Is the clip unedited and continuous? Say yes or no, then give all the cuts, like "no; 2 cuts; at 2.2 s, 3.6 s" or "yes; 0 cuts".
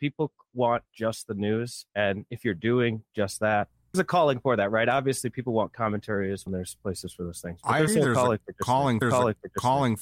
no; 5 cuts; at 1.9 s, 3.9 s, 6.5 s, 7.9 s, 9.0 s